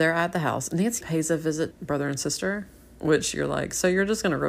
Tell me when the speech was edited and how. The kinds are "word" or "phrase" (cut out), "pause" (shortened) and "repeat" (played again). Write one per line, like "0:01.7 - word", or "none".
0:01.0 - word
0:01.7 - phrase